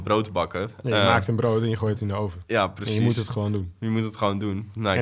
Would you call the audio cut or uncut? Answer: uncut